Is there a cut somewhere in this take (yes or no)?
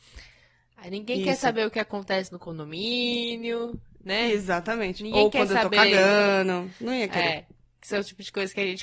no